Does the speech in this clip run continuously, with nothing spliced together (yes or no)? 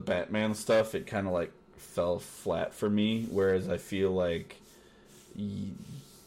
yes